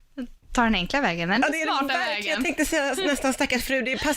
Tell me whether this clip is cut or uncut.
uncut